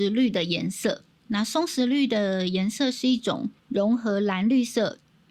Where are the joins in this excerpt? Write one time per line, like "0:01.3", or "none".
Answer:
0:01.1
0:03.6